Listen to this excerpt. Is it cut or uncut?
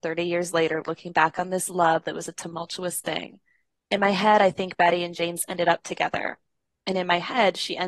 uncut